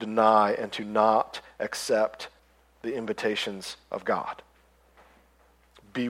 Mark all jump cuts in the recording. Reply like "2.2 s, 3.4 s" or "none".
2.4 s